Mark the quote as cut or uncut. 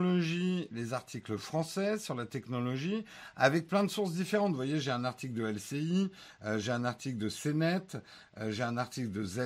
uncut